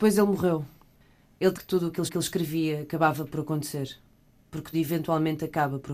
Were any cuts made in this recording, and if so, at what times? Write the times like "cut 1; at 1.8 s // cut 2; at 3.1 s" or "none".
cut 1; at 1.5 s // cut 2; at 2.1 s // cut 3; at 4.7 s

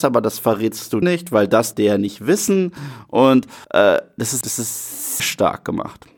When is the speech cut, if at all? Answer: cut 1; at 1.0 s // cut 2; at 1.7 s // cut 3; at 3.6 s // cut 4; at 4.4 s // cut 5; at 5.2 s

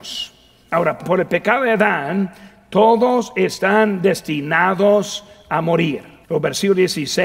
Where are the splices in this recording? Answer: cut 1; at 1.0 s // cut 2; at 6.2 s

